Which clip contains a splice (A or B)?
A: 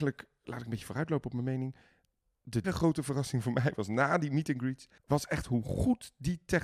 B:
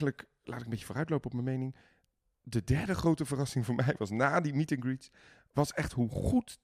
A